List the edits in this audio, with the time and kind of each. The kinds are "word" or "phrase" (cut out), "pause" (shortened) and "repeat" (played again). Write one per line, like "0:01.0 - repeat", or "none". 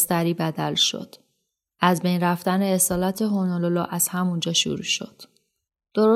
none

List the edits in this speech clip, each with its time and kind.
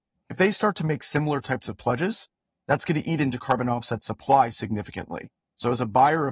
none

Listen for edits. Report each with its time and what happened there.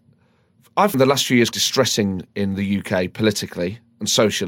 0:00.9 - word
0:01.5 - word

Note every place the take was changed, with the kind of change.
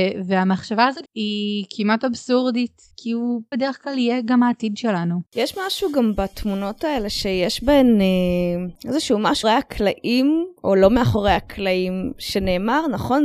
0:01.1 - phrase
0:02.9 - pause
0:03.5 - phrase
0:05.3 - pause
0:08.8 - pause
0:09.4 - word
0:10.6 - pause

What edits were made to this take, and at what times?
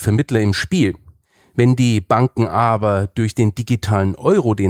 none

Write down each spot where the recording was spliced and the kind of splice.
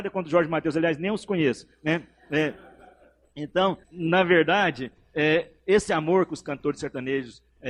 0:03.8 - word

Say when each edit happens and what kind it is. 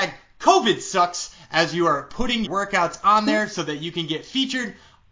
0:02.5 - word

